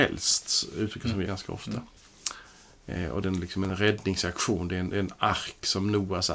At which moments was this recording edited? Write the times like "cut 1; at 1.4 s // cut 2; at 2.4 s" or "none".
cut 1; at 1.2 s // cut 2; at 3.2 s